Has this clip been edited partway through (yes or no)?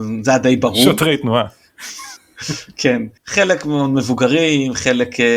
yes